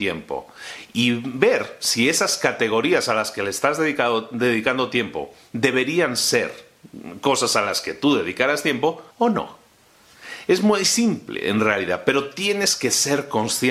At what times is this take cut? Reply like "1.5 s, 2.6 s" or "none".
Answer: 9.1 s